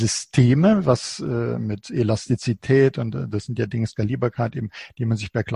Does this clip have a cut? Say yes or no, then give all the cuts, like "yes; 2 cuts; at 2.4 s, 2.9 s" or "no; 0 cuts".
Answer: no; 0 cuts